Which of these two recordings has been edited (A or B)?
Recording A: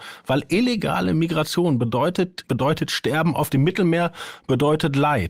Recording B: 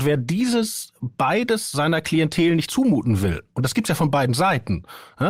A